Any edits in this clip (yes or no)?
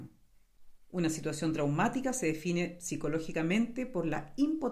no